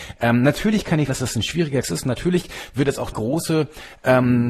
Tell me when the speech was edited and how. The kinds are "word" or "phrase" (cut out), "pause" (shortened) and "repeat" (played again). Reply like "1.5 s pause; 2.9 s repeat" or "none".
1.1 s word; 1.8 s word; 3.1 s word